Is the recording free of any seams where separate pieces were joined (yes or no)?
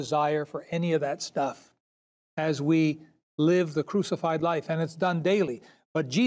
yes